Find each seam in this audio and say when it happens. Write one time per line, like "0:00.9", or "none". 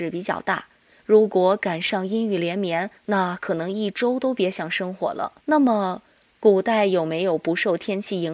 0:03.0
0:05.4